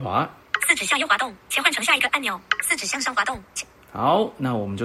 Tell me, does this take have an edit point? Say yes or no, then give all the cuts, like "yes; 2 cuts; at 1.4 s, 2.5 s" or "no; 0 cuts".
yes; 1 cut; at 2.1 s